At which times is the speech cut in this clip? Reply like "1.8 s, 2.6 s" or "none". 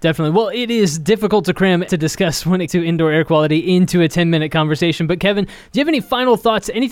1.9 s, 2.7 s

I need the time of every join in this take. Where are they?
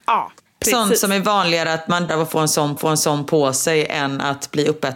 2.1 s, 2.8 s

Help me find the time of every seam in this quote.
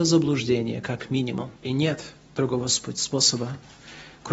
1.6 s

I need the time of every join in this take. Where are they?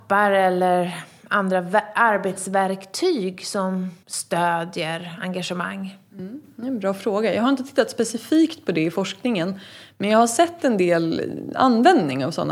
4.0 s

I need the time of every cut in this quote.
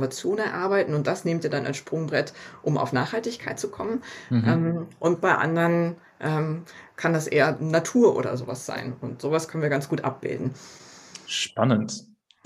none

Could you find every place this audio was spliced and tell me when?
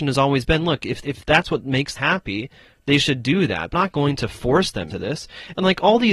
1.0 s, 2.0 s, 3.7 s, 4.9 s

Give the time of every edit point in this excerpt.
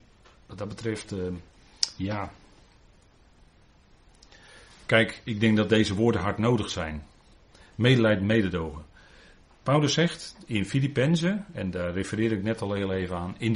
none

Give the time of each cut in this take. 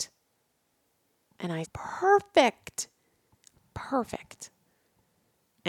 1.6 s

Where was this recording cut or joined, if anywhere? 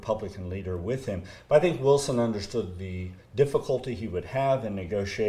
none

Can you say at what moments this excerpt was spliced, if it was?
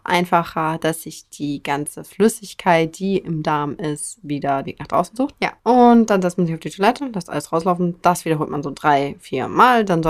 4.6 s, 5.6 s

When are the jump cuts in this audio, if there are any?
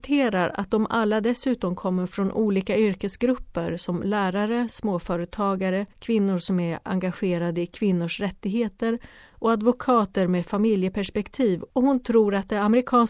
5.9 s

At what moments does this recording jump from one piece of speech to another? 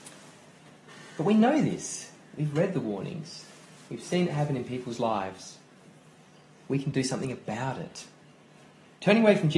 none

